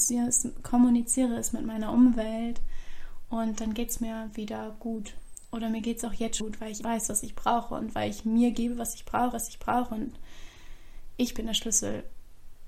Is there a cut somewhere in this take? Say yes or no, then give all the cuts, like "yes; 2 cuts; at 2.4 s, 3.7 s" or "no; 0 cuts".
yes; 3 cuts; at 6.4 s, 6.8 s, 9.3 s